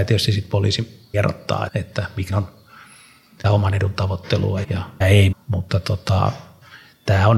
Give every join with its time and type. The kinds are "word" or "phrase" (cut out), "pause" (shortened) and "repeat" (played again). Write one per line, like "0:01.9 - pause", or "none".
0:01.1 - word
0:01.7 - word
0:02.3 - word
0:03.4 - word
0:04.6 - word
0:05.0 - word
0:05.3 - word